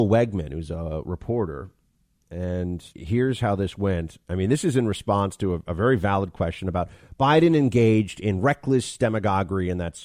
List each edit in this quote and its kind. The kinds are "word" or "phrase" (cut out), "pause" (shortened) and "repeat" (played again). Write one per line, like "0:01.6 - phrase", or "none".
0:02.9 - pause